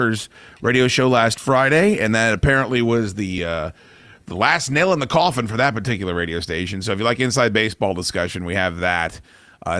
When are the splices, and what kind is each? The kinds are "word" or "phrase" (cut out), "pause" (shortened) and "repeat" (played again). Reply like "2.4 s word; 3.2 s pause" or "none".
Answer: none